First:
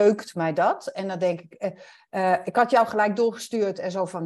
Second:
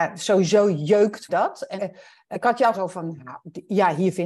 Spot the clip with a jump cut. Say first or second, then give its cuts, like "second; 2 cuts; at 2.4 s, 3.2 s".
second; 4 cuts; at 1.3 s, 1.8 s, 2.3 s, 2.7 s